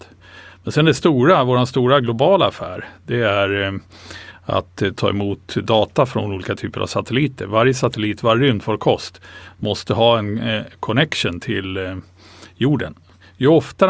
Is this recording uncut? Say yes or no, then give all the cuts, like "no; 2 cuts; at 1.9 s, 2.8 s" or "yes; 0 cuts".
yes; 0 cuts